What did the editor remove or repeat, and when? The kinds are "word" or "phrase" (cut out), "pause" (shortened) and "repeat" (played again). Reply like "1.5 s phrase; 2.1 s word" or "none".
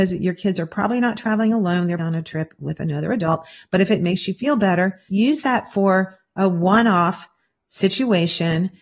2.0 s word; 5.1 s word